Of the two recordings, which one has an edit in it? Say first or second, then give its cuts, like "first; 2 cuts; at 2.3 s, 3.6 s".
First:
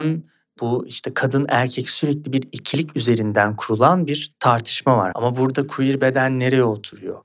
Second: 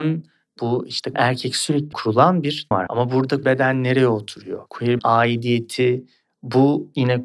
second; 5 cuts; at 1.1 s, 1.9 s, 2.7 s, 3.4 s, 5.0 s